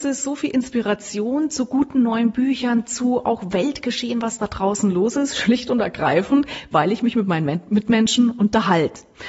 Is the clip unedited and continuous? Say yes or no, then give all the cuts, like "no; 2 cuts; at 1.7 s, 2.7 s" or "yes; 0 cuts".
yes; 0 cuts